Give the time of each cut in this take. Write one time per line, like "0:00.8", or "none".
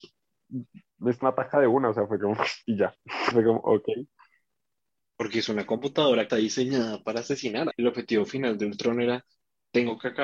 0:01.2
0:02.2
0:03.3
0:04.5
0:06.3
0:07.7

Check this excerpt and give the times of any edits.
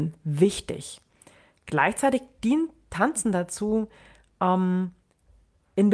none

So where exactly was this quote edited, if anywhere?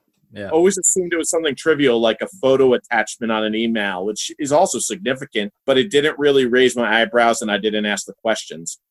0:05.6

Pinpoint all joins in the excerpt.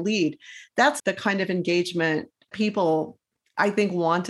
0:01.0
0:02.5

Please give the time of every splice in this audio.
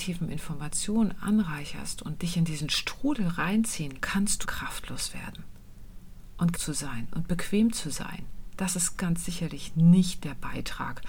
0:02.2
0:04.0
0:04.4
0:06.5
0:08.9

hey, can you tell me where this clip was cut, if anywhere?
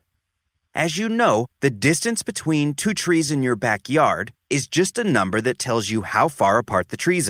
none

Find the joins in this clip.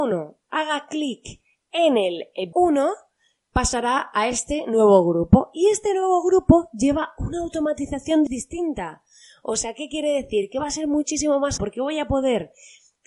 0:02.5
0:08.3
0:11.6

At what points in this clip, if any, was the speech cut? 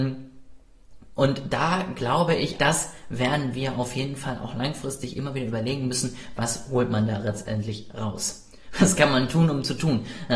0:02.6

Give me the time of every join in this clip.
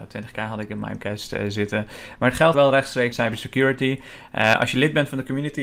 0:02.5
0:03.1

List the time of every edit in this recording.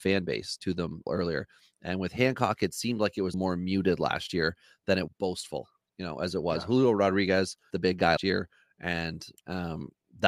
0:01.1
0:03.3
0:05.1
0:07.7
0:08.2

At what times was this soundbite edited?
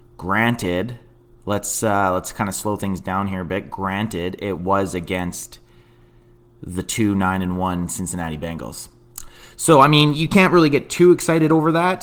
none

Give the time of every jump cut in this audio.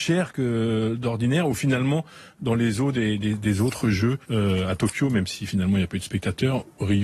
0:04.2

